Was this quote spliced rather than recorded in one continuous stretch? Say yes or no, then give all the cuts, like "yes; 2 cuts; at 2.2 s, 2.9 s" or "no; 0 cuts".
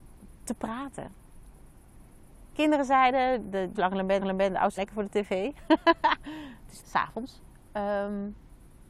yes; 6 cuts; at 2.5 s, 3.4 s, 3.7 s, 4.2 s, 4.8 s, 6.8 s